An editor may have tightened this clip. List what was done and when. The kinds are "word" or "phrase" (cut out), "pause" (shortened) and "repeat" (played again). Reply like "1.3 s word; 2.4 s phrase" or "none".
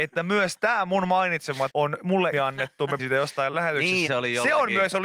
1.7 s word; 2.3 s word; 3.0 s word; 3.5 s word; 4.1 s word